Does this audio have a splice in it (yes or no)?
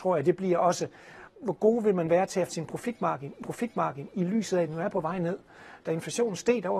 yes